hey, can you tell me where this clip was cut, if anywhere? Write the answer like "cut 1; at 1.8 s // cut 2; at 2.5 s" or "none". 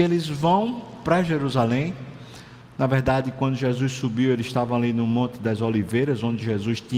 none